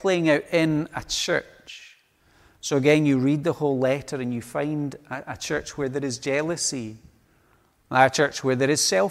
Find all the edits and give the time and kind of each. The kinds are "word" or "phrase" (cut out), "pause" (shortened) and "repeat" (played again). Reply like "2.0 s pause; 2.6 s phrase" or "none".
none